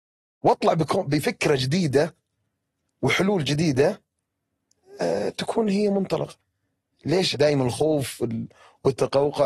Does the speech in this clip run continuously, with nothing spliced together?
no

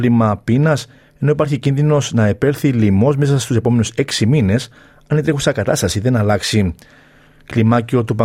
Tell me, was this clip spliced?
no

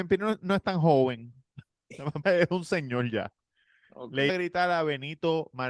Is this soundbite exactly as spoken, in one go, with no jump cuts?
no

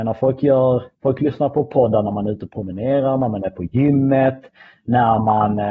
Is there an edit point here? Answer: yes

